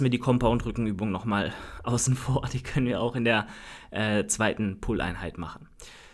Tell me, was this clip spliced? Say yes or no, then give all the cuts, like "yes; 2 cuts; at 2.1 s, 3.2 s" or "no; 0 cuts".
no; 0 cuts